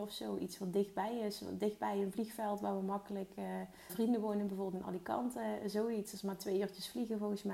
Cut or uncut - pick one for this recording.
cut